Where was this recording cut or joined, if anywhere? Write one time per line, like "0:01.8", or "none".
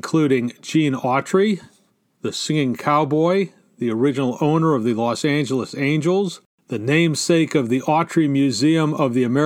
none